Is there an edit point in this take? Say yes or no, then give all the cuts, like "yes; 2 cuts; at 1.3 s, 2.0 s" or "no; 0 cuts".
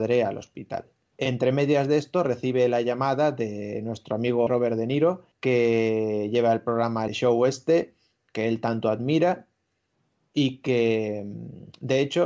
yes; 4 cuts; at 1.1 s, 4.5 s, 5.3 s, 7.1 s